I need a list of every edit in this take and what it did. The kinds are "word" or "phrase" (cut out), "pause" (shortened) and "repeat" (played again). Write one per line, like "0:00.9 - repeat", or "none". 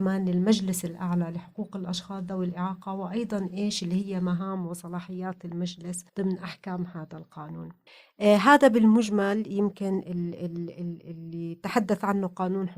0:06.1 - pause
0:07.9 - pause

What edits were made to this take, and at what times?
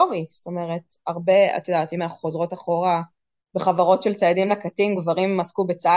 none

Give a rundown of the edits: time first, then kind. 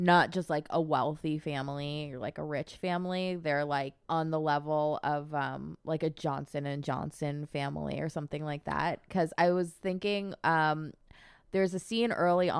0:04.0 - pause

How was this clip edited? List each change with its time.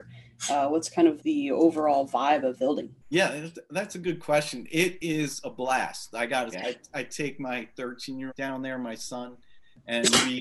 0:01.2 - word
0:02.6 - phrase
0:03.0 - pause
0:06.5 - word
0:08.3 - phrase

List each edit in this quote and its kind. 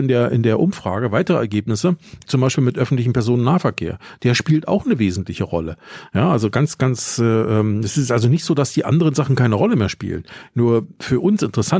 none

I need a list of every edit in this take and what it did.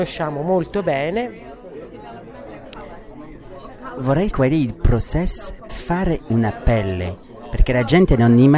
0:04.3 - word
0:05.7 - word

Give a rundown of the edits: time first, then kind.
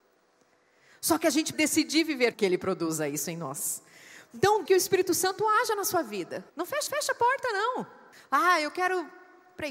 0:01.5 - word
0:02.3 - phrase
0:04.7 - word
0:06.5 - pause
0:06.9 - repeat
0:08.1 - pause

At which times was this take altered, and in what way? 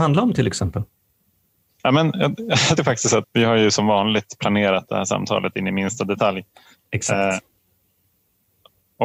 0:02.8 - word
0:03.2 - word

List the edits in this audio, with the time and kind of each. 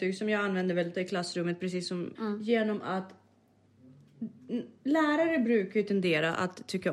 0:00.9 - word
0:02.1 - word

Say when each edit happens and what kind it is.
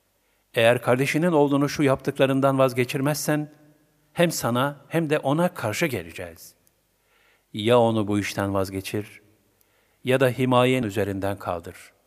0:10.8 - word

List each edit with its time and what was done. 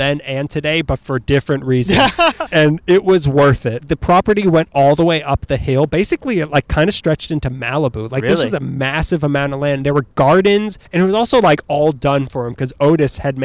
0:10.8 - pause

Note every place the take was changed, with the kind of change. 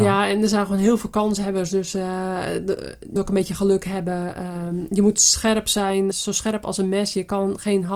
0:03.2 - word
0:06.1 - word

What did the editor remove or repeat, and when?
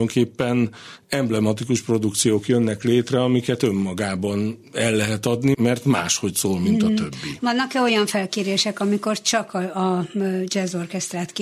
0:05.5 - word

